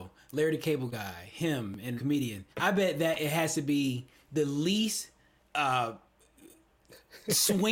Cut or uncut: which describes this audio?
cut